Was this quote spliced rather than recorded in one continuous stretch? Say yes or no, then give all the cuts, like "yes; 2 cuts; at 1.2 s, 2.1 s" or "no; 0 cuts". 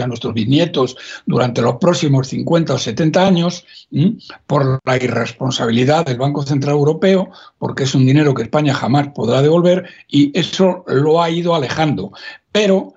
no; 0 cuts